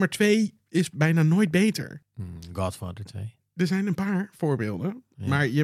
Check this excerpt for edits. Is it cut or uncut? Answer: uncut